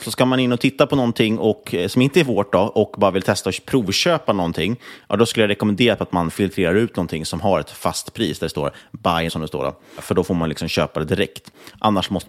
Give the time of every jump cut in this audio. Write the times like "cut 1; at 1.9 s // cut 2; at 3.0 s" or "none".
cut 1; at 9.3 s